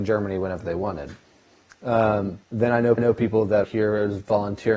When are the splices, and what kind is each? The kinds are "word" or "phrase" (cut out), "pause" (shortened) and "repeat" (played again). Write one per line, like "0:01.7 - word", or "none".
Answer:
0:02.4 - pause
0:03.0 - repeat
0:03.6 - word